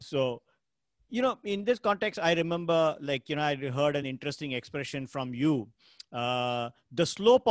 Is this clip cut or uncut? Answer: uncut